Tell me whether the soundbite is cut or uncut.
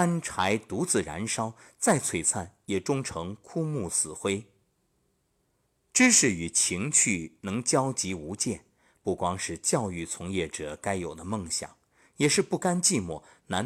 uncut